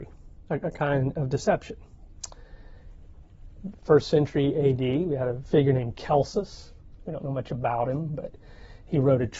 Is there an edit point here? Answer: no; 0 cuts

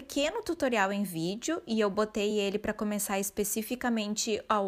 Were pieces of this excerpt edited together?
no; 0 cuts

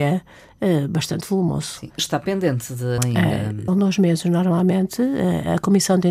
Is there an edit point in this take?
yes; 3 cuts; at 2.0 s, 3.0 s, 3.7 s

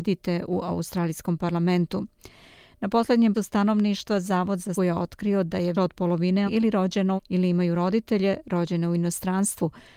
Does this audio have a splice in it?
yes; 5 cuts; at 3.3 s, 4.8 s, 5.7 s, 6.5 s, 7.2 s

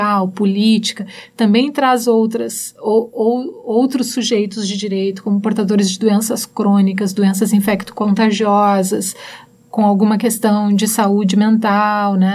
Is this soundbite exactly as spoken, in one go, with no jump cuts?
yes; 0 cuts

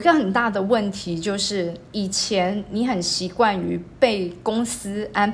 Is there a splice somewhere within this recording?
no; 0 cuts

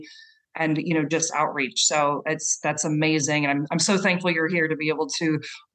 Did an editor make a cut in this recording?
no; 0 cuts

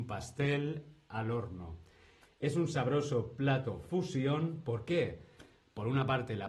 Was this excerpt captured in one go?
yes; 0 cuts

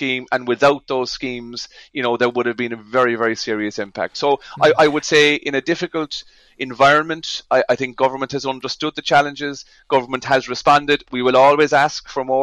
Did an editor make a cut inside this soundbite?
no; 0 cuts

